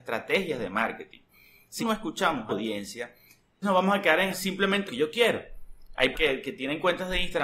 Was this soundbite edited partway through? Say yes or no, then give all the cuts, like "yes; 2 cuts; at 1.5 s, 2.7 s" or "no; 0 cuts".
yes; 6 cuts; at 1.8 s, 2.5 s, 3.6 s, 4.3 s, 4.9 s, 6.1 s